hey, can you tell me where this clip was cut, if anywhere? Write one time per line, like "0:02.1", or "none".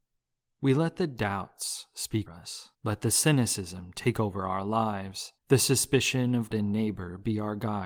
0:02.3
0:02.7
0:05.4
0:06.5